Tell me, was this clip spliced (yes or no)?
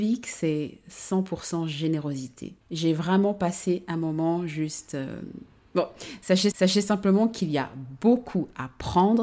yes